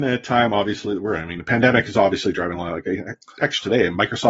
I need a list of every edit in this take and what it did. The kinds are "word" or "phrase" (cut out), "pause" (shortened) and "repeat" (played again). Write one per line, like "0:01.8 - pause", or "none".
none